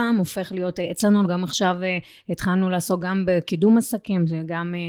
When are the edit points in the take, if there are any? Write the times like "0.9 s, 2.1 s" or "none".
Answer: 1.2 s

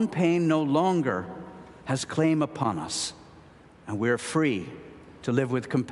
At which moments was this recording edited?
none

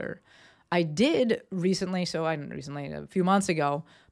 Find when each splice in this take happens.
none

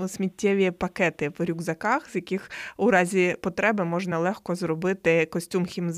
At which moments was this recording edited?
none

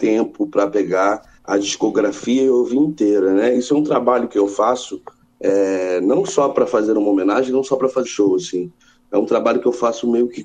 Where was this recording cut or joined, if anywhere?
1.4 s, 8.0 s

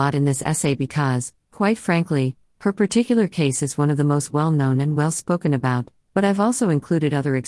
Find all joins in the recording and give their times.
none

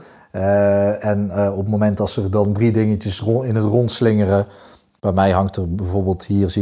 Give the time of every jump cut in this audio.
none

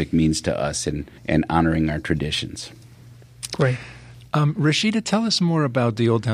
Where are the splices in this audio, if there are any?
1.2 s

